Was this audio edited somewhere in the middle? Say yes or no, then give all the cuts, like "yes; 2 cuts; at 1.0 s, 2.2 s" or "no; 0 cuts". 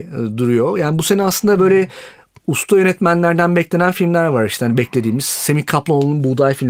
no; 0 cuts